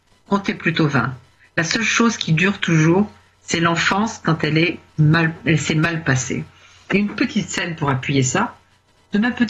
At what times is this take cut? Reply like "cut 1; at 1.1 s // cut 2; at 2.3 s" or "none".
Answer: none